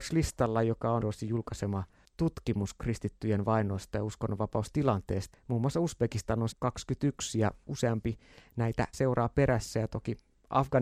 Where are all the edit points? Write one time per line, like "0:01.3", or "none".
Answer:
0:01.0
0:05.3
0:06.5
0:07.6
0:08.9